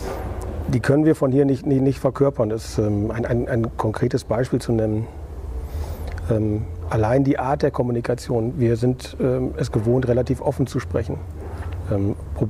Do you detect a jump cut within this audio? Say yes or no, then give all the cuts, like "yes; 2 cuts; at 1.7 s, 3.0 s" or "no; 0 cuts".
no; 0 cuts